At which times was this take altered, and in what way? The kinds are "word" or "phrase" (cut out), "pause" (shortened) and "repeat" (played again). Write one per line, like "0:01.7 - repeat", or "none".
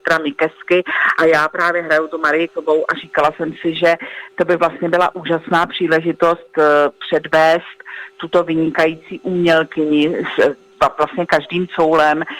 0:02.5 - word